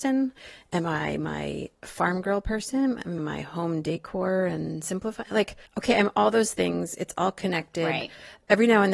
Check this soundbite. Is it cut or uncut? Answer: cut